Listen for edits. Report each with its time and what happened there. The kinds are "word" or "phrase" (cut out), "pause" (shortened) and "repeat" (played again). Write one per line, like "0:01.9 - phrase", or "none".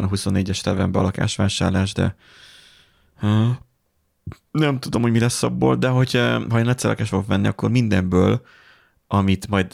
none